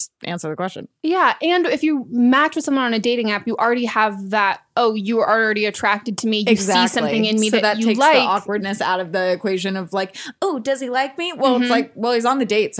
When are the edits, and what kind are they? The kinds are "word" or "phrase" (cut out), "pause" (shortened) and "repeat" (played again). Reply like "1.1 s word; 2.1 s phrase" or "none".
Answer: none